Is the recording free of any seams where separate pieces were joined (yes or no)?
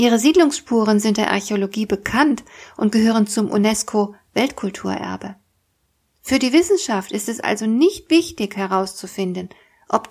yes